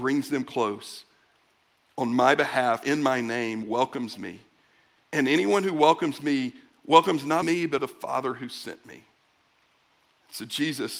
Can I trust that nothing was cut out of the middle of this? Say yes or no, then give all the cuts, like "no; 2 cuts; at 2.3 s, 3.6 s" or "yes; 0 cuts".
no; 3 cuts; at 2.8 s, 7.4 s, 7.8 s